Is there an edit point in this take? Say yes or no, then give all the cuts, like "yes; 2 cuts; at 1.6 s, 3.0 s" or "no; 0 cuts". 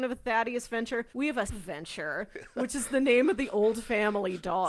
yes; 2 cuts; at 1.1 s, 1.5 s